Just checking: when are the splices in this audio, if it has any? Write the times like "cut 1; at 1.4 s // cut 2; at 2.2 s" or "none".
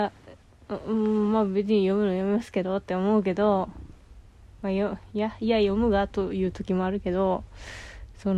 none